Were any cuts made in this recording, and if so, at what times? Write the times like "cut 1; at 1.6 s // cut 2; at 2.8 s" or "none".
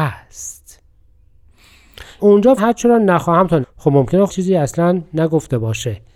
cut 1; at 2.2 s // cut 2; at 2.6 s // cut 3; at 3.6 s // cut 4; at 4.3 s

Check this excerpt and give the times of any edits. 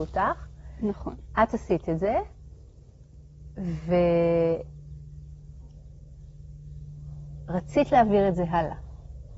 none

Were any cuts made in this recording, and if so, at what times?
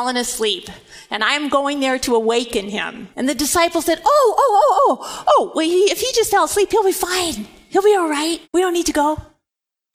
cut 1; at 3.1 s // cut 2; at 8.4 s

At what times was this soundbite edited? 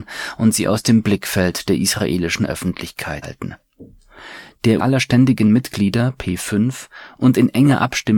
cut 1; at 3.2 s // cut 2; at 4.8 s

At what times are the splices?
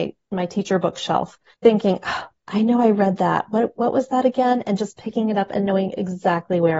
cut 1; at 1.5 s

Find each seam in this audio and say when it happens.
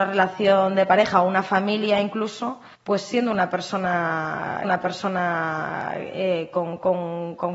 cut 1; at 2.7 s // cut 2; at 4.6 s

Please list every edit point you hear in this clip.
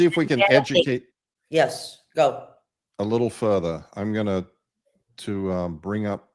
none

